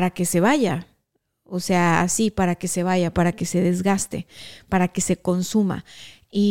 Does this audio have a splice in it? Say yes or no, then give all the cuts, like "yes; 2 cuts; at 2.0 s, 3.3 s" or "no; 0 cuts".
no; 0 cuts